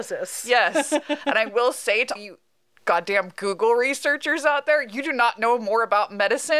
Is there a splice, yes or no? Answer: yes